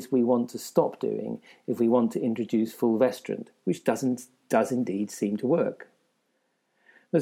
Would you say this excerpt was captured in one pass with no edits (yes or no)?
yes